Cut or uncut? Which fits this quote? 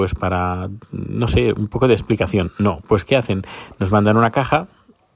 uncut